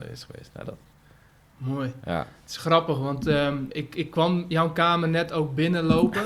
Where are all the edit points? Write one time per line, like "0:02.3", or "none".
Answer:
0:03.7